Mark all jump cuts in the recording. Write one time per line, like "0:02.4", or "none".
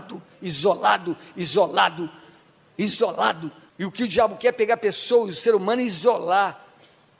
0:03.7